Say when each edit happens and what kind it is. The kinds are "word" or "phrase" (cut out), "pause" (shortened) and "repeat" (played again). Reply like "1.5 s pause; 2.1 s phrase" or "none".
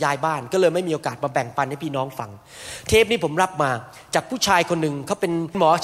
none